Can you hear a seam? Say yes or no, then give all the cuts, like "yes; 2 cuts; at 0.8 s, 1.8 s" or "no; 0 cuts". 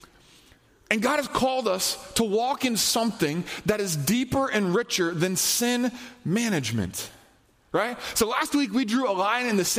no; 0 cuts